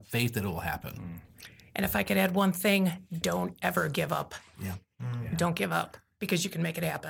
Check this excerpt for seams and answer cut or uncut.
uncut